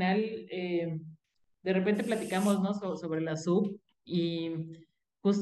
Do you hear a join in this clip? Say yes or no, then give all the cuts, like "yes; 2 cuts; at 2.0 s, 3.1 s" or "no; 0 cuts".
no; 0 cuts